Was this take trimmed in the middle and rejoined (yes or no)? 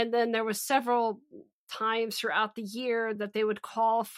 no